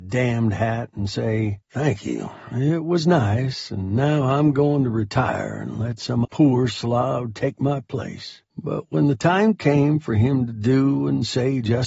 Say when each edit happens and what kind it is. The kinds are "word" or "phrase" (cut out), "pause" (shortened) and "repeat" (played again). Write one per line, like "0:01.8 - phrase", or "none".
0:01.6 - pause
0:06.2 - word
0:08.5 - pause